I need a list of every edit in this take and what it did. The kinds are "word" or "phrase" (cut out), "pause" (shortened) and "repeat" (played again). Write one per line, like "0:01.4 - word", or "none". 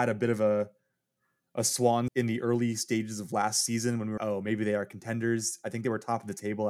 0:02.1 - word
0:04.2 - word